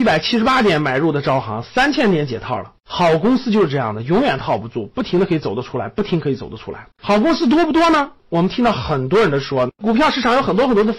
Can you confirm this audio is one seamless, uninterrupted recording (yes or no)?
no